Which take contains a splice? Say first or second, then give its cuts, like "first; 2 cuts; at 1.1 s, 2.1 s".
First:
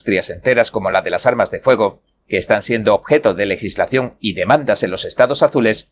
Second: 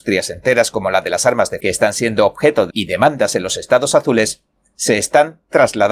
second; 2 cuts; at 1.6 s, 2.7 s